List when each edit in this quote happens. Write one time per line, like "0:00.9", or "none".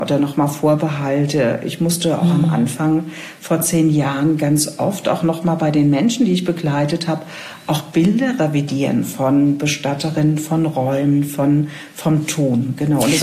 none